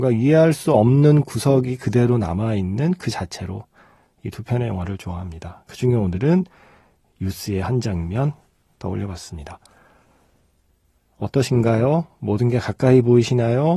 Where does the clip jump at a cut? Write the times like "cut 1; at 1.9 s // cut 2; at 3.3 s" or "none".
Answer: none